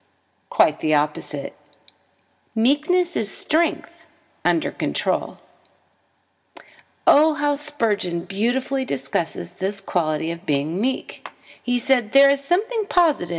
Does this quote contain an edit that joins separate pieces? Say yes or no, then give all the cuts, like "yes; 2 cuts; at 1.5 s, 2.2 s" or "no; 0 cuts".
no; 0 cuts